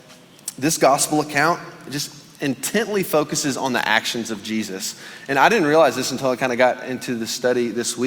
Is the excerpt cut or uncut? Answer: uncut